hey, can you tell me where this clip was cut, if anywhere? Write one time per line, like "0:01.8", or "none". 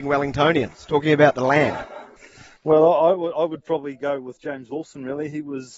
0:02.2